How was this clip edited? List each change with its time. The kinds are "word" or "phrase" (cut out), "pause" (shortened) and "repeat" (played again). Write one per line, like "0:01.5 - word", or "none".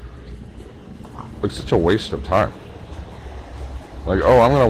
none